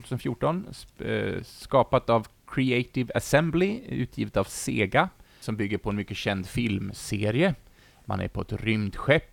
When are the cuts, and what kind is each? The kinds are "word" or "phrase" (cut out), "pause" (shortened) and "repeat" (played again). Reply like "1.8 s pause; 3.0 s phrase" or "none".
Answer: 5.4 s word